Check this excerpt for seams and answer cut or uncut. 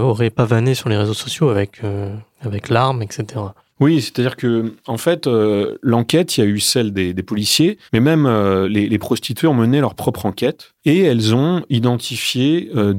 cut